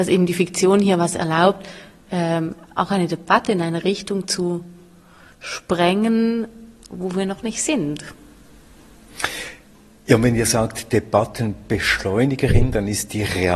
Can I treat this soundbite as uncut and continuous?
yes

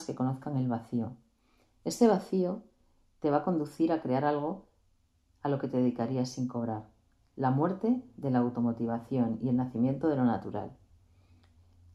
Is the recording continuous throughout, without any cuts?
yes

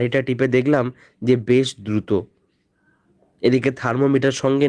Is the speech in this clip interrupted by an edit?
no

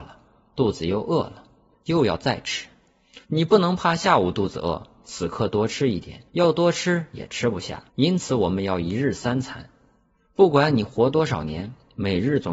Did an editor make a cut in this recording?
yes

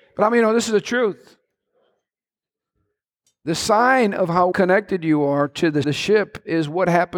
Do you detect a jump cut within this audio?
yes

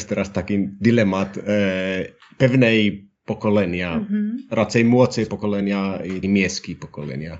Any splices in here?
yes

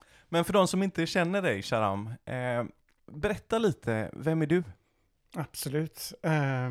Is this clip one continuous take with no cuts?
yes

